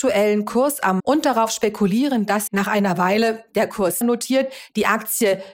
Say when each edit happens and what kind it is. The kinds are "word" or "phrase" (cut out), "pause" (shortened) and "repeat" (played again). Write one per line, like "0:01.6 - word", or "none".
0:01.0 - phrase
0:02.5 - word
0:04.0 - word